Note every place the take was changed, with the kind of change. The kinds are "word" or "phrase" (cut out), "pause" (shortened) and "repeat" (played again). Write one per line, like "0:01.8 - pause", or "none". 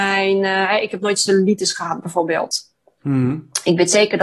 none